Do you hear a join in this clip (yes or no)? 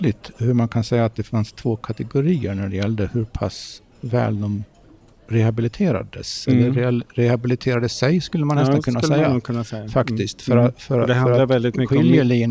no